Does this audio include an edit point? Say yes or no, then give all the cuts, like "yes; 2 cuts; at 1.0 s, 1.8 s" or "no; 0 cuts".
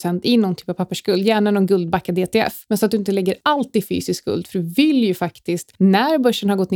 no; 0 cuts